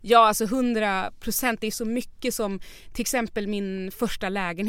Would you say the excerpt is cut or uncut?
uncut